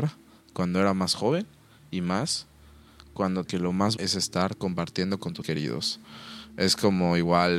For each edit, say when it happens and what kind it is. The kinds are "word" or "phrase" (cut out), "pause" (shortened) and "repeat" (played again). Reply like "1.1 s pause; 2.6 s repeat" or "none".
3.5 s phrase; 4.0 s phrase; 5.4 s word